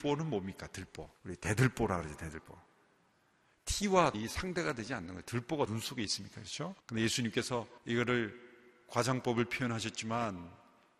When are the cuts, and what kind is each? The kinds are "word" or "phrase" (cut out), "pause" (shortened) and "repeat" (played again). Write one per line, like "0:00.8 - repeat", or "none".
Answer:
0:01.2 - pause
0:04.1 - word
0:05.7 - word
0:06.8 - pause
0:07.8 - pause